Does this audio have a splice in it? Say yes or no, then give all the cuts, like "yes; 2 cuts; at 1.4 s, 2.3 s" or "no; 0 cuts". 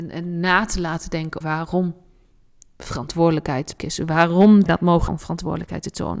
yes; 4 cuts; at 1.4 s, 3.8 s, 4.7 s, 5.1 s